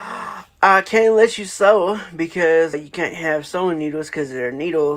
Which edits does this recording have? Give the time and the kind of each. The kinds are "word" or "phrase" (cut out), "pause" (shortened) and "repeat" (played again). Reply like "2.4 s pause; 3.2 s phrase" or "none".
2.7 s word